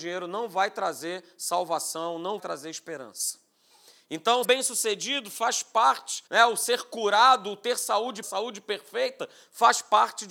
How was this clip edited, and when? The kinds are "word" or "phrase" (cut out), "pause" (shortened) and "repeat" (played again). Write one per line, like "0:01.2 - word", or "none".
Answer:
0:02.4 - word
0:04.4 - word
0:06.3 - pause
0:08.2 - word

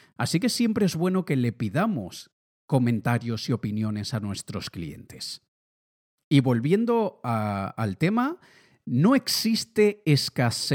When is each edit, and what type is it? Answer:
none

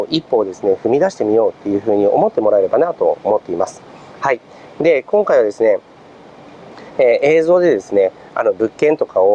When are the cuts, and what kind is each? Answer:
none

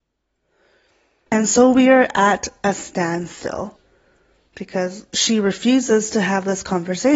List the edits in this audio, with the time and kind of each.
none

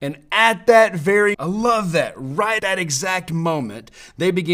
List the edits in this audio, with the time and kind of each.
0:01.3 - word
0:02.6 - word

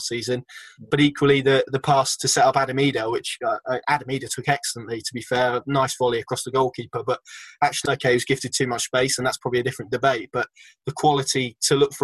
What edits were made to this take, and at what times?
0:07.9 - phrase

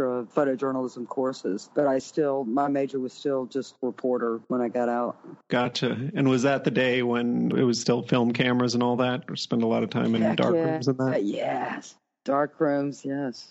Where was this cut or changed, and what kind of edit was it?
none

